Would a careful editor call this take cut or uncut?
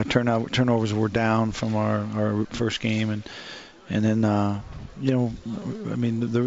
uncut